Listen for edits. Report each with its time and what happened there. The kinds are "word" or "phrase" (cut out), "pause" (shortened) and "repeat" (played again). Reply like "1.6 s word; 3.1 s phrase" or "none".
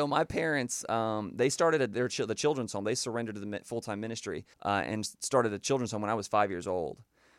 4.5 s pause